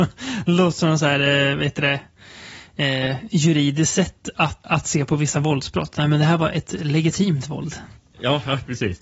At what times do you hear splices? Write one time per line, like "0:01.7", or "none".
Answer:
0:04.6